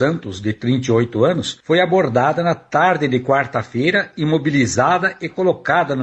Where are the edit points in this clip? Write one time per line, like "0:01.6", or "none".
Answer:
none